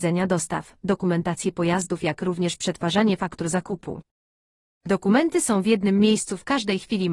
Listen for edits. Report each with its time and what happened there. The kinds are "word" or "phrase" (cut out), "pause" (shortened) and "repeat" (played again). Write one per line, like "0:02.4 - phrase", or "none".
none